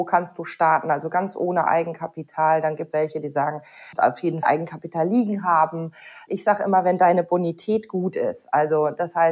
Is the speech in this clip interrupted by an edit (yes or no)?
yes